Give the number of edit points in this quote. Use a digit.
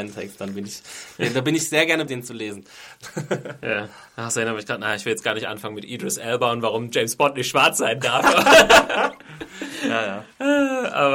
2